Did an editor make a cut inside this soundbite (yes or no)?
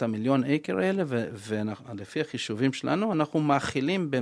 no